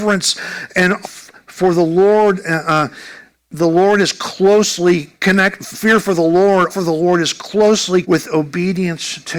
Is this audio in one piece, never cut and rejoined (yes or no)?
no